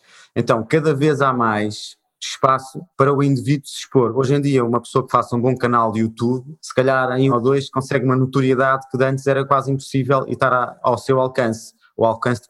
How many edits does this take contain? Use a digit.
3